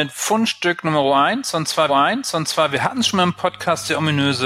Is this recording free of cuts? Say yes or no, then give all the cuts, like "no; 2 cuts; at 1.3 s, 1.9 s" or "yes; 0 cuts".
no; 1 cut; at 1.9 s